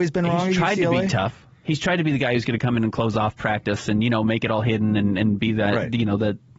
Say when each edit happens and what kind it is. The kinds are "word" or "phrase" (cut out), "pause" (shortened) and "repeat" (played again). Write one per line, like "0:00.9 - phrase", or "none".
none